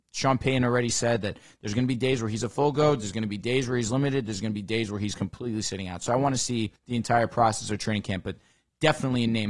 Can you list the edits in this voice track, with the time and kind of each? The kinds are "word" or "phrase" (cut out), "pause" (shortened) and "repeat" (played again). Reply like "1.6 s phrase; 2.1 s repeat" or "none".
6.8 s pause

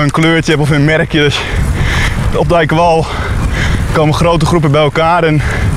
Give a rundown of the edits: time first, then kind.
2.3 s word

